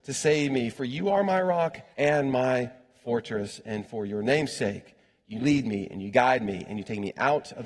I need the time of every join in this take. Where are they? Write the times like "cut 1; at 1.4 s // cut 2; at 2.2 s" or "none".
cut 1; at 1.9 s